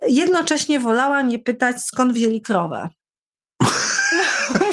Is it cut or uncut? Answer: uncut